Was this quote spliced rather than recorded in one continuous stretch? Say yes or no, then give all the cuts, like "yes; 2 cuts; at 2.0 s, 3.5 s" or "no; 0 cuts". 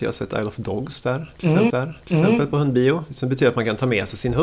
yes; 1 cut; at 1.7 s